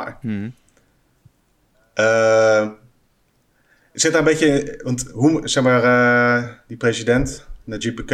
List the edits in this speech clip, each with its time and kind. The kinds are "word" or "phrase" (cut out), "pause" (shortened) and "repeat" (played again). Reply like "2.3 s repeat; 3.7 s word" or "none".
none